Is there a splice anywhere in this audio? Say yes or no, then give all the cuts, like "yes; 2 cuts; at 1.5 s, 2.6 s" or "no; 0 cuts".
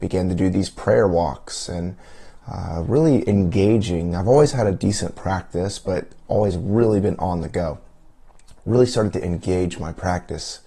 no; 0 cuts